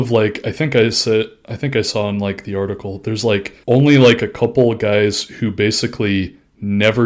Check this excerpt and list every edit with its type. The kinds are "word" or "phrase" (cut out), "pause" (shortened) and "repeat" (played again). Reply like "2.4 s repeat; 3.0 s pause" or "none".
3.6 s pause